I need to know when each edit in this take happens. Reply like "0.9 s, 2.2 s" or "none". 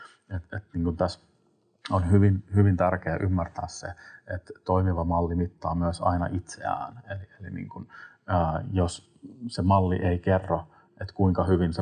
none